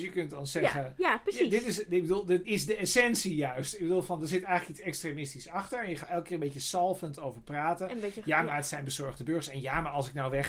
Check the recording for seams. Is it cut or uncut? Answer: cut